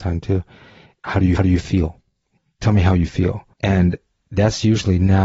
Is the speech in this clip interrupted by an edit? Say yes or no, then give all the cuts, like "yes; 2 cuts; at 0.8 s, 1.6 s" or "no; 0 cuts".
yes; 2 cuts; at 1.4 s, 3.5 s